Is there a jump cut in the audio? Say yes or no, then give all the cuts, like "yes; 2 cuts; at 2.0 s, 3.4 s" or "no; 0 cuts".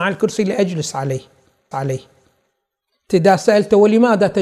yes; 1 cut; at 1.7 s